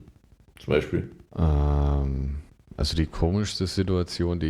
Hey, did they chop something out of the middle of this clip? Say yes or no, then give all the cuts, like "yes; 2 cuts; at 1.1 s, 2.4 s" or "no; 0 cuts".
yes; 1 cut; at 1.3 s